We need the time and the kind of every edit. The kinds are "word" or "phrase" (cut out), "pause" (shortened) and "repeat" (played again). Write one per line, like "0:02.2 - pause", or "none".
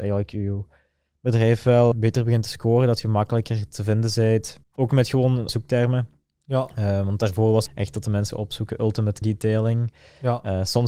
0:01.9 - word
0:04.6 - pause
0:05.5 - word
0:07.7 - phrase
0:08.3 - word
0:09.2 - word